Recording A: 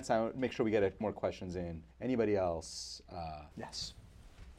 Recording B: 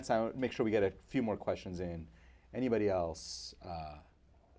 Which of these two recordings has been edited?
A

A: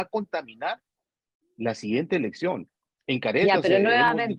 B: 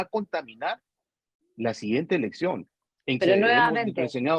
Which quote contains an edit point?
B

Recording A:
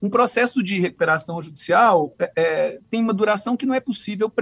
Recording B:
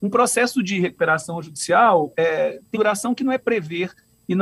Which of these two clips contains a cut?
B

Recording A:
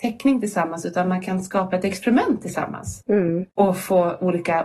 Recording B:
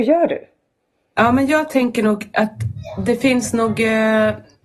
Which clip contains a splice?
A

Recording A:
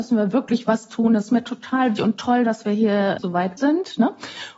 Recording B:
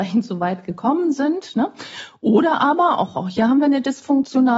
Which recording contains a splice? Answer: A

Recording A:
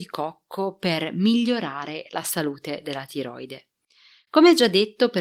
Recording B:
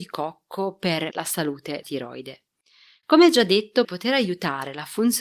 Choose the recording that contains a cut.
B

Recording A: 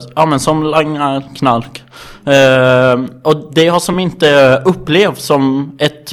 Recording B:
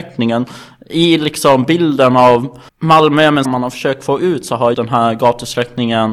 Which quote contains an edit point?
B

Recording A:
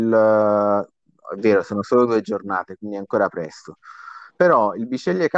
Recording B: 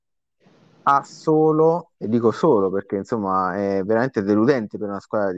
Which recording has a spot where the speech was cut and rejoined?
B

